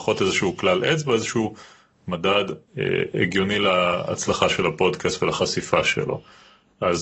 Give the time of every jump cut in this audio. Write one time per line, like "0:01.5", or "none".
0:02.7